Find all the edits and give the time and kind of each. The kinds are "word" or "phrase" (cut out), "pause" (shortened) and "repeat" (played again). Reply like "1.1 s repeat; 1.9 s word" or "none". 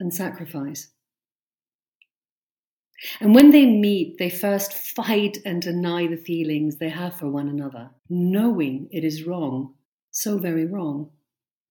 8.0 s pause; 9.8 s pause